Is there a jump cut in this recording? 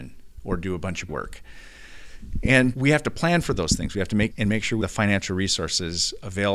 yes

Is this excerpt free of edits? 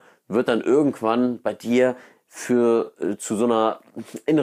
yes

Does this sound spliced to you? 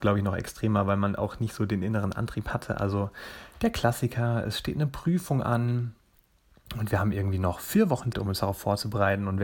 yes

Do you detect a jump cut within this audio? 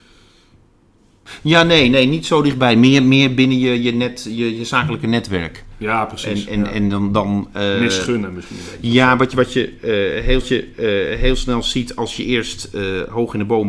yes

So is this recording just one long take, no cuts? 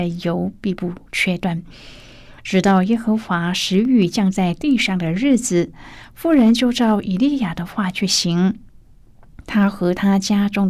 yes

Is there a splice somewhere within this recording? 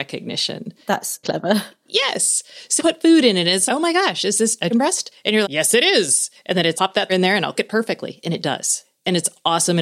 yes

